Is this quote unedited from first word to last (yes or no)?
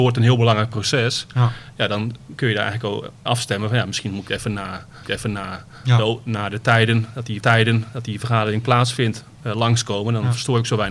no